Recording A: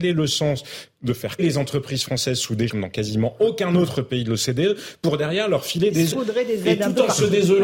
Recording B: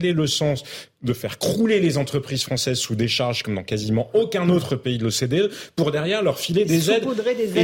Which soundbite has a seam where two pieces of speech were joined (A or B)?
A